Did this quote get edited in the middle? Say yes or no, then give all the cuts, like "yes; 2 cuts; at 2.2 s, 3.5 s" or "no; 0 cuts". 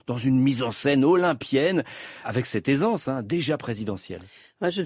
yes; 1 cut; at 2.2 s